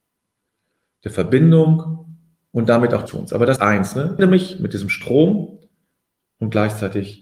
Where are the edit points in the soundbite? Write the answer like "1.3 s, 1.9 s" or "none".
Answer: 3.1 s, 3.6 s, 4.2 s